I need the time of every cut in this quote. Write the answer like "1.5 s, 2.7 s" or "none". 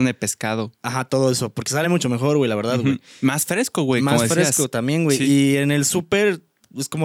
none